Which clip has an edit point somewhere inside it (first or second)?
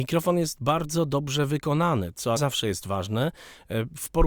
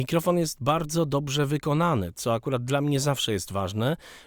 first